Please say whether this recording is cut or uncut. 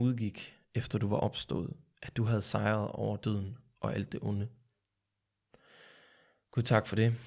uncut